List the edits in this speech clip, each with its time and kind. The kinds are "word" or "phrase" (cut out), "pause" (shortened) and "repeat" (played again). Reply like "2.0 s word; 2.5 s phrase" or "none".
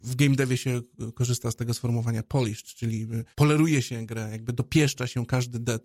3.3 s pause